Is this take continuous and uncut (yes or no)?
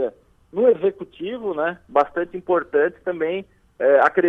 yes